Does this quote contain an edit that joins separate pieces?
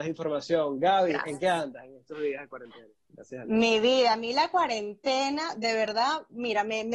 no; 0 cuts

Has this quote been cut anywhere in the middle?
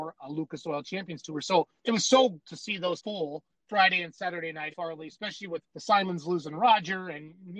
yes; 6 cuts; at 1.8 s, 2.4 s, 3.0 s, 3.5 s, 4.7 s, 5.6 s

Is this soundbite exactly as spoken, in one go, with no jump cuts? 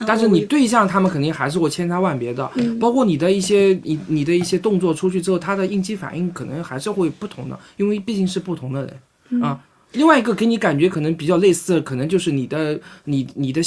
yes; 0 cuts

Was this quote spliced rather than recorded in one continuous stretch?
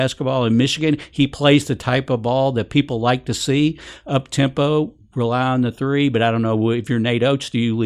no; 0 cuts

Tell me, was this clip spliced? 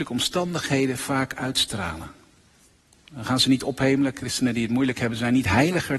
no; 0 cuts

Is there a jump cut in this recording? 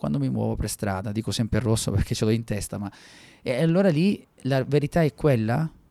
no; 0 cuts

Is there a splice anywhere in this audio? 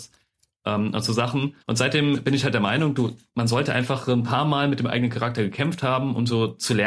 yes; 1 cut; at 1.6 s

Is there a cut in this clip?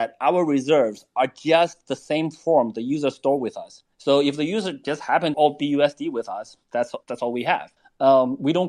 yes; 4 cuts; at 3.9 s, 5.3 s, 7.0 s, 7.8 s

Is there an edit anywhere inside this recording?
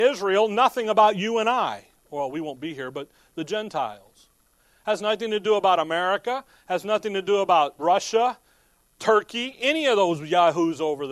no; 0 cuts

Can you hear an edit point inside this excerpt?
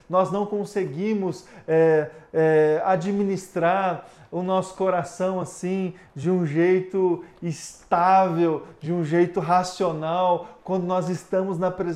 no; 0 cuts

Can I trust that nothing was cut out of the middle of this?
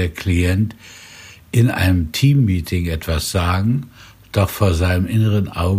yes; 0 cuts

